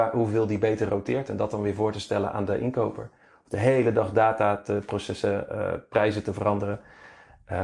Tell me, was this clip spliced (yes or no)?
no